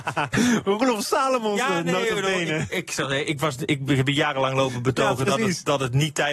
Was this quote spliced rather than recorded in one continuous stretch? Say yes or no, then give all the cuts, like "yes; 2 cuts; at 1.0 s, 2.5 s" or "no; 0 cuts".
no; 0 cuts